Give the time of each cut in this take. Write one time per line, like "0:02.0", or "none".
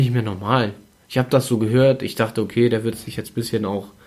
none